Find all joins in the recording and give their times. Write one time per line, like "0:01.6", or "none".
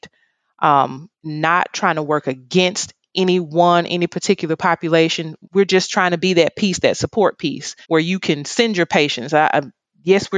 0:01.1
0:05.4
0:07.8

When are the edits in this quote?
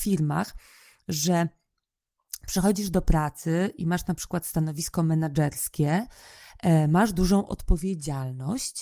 none

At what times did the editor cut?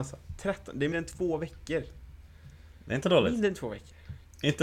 0:00.9

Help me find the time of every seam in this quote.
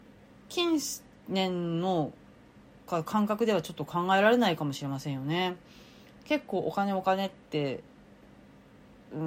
none

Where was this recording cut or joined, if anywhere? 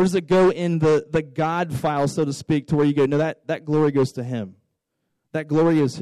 none

